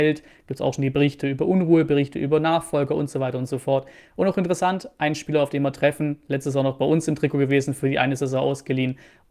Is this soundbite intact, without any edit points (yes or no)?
yes